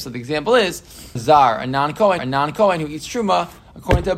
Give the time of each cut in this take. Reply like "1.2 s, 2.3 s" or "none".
1.2 s, 2.2 s